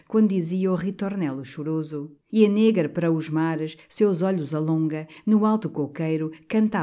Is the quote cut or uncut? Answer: cut